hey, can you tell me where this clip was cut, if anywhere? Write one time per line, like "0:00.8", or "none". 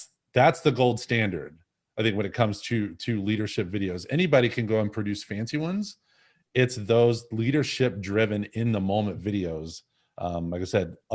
none